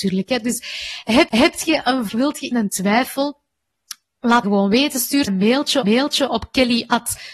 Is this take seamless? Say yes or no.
no